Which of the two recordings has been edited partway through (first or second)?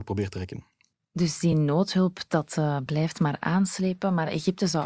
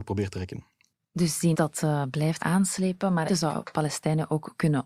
second